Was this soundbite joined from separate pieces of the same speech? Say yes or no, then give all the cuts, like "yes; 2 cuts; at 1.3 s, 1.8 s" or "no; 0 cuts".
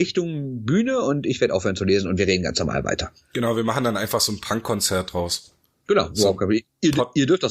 no; 0 cuts